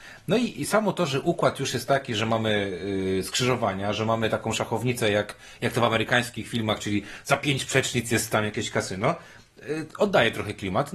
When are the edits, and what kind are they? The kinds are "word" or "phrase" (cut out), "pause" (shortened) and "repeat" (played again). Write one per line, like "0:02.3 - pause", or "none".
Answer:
none